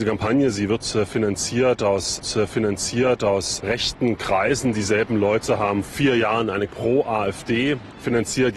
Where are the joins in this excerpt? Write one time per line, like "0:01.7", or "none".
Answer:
0:02.2
0:05.8
0:06.7